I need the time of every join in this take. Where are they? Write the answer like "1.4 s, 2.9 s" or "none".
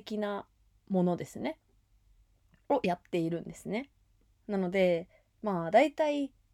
none